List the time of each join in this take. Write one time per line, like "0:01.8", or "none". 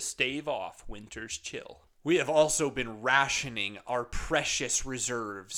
none